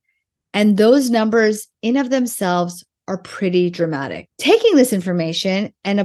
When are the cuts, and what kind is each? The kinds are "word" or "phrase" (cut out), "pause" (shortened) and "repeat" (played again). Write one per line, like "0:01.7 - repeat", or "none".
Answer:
none